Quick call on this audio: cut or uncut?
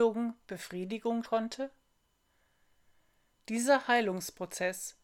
cut